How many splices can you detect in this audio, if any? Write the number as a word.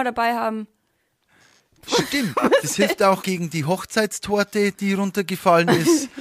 one